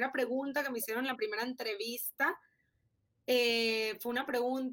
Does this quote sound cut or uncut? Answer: uncut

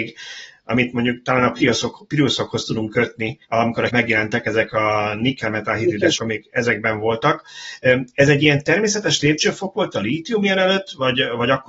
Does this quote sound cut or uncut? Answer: cut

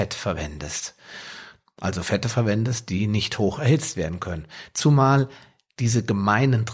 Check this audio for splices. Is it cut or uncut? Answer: uncut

